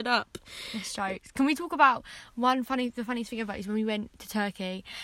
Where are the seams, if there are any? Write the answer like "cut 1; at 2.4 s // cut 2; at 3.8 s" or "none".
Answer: none